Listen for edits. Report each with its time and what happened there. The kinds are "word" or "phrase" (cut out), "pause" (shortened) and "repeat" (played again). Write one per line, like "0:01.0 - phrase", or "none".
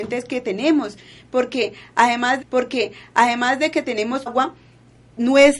0:02.4 - repeat
0:04.3 - word